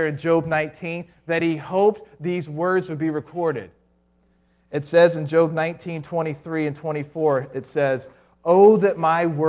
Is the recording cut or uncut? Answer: uncut